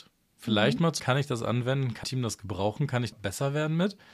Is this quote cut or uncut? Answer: cut